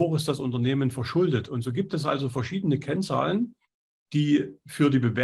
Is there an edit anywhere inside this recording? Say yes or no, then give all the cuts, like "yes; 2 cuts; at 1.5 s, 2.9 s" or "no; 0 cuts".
no; 0 cuts